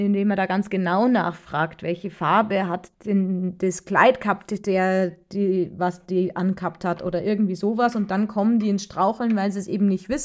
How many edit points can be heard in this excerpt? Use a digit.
1